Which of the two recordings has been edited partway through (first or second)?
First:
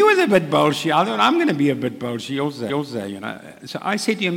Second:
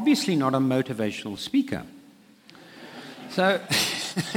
first